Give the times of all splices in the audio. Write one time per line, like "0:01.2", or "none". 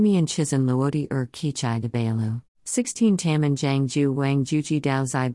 0:02.5